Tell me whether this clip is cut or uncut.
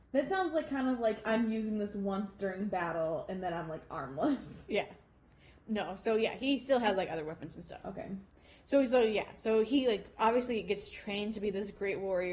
uncut